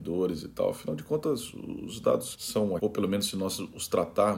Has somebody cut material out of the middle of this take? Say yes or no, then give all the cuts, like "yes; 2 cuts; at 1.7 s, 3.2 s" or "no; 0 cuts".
yes; 2 cuts; at 2.3 s, 2.8 s